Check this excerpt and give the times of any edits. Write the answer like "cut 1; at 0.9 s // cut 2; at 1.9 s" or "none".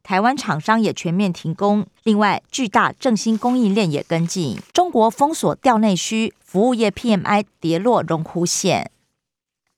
cut 1; at 2.0 s // cut 2; at 4.7 s